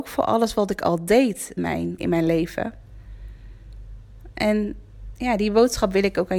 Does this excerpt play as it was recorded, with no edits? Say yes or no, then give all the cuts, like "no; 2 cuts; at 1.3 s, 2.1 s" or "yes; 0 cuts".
no; 2 cuts; at 1.6 s, 2.0 s